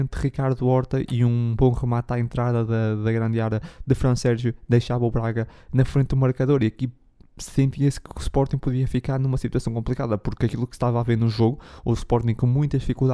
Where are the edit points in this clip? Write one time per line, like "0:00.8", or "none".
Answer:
none